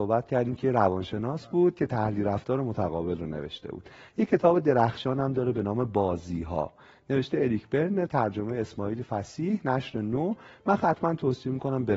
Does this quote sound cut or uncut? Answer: uncut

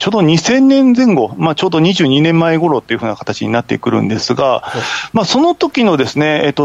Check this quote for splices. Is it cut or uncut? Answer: uncut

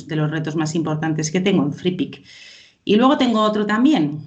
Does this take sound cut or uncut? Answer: uncut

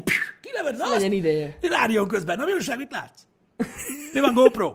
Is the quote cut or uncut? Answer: uncut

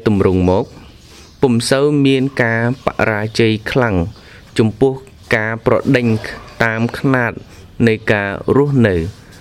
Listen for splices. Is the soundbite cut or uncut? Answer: uncut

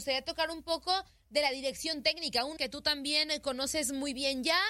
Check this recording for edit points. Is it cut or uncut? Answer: cut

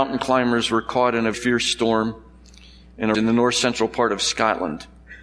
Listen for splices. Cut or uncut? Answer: cut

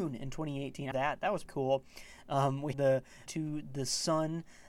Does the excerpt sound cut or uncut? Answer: cut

